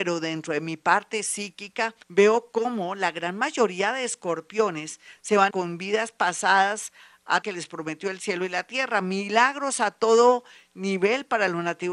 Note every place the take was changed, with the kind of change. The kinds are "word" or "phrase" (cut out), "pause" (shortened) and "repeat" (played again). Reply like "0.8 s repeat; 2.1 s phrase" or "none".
2.0 s pause; 5.5 s phrase; 7.4 s phrase